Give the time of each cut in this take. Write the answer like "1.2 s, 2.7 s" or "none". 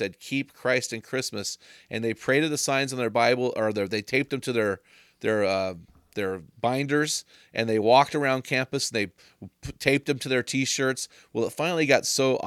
none